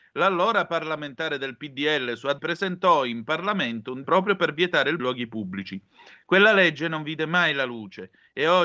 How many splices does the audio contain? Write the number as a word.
three